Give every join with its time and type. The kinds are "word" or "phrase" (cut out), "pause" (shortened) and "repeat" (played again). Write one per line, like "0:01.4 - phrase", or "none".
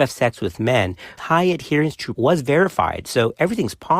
0:01.2 - word
0:02.1 - word